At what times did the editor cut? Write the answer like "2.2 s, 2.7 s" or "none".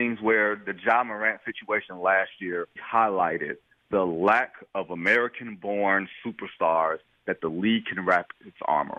2.8 s